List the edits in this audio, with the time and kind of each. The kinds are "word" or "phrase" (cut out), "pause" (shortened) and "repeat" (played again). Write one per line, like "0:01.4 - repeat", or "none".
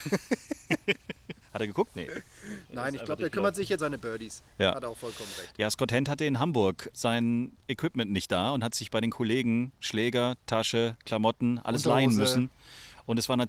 0:03.8 - word
0:06.9 - word
0:11.0 - pause